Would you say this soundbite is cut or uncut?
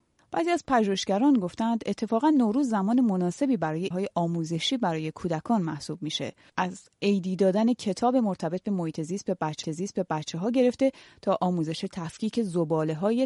cut